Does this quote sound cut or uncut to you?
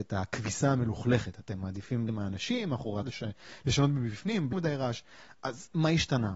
cut